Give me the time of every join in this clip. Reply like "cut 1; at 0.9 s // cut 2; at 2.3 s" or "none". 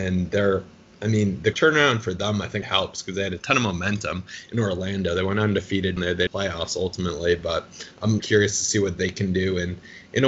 cut 1; at 1.5 s // cut 2; at 2.6 s // cut 3; at 3.4 s // cut 4; at 6.0 s // cut 5; at 6.3 s // cut 6; at 8.2 s